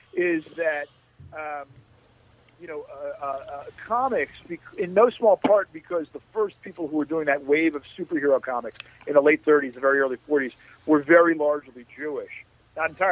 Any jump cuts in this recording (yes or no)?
no